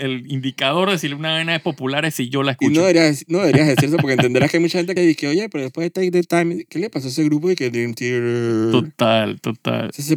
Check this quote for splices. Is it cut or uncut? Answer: cut